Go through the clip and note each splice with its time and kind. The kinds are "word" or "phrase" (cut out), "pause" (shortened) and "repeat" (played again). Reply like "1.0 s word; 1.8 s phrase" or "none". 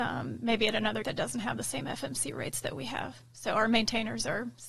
1.0 s word

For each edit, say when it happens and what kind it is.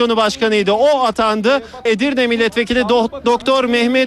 1.9 s phrase

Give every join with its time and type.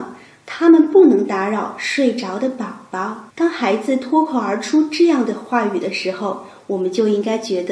3.3 s pause

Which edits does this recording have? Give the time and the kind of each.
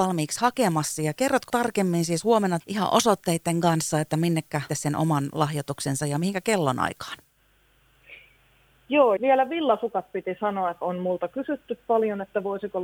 1.5 s word; 2.6 s word; 4.7 s phrase; 9.2 s word; 10.8 s word

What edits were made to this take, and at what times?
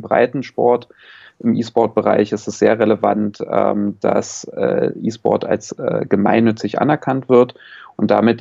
none

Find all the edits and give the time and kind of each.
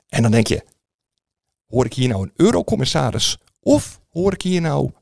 none

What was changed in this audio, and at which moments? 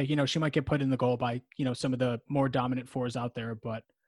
none

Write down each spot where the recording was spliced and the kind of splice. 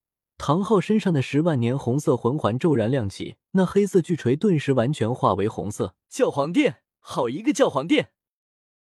3.4 s pause; 6.0 s pause

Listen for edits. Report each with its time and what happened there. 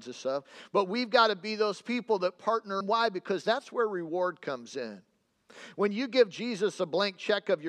2.8 s phrase

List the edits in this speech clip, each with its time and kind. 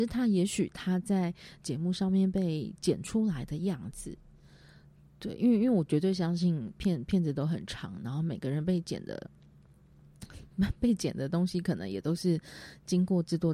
none

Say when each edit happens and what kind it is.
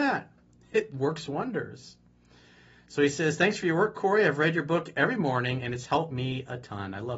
none

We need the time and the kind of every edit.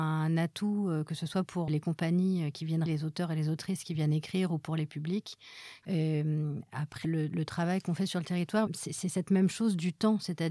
1.7 s word; 2.9 s word; 7.0 s word; 8.7 s word

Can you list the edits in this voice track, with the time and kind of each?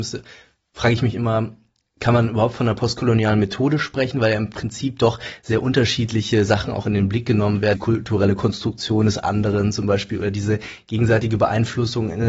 7.7 s word

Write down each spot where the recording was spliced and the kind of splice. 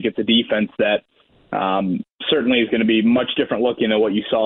none

